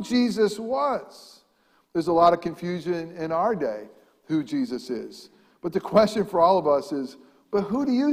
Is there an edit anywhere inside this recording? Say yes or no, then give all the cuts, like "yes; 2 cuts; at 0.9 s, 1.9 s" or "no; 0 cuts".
no; 0 cuts